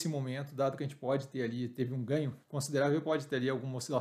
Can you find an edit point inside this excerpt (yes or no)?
yes